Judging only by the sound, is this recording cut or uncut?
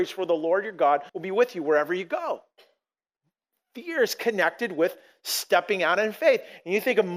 cut